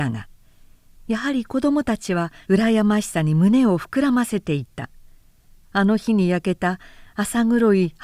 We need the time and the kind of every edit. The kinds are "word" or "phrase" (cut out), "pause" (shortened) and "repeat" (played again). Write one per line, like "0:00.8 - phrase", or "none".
0:02.4 - pause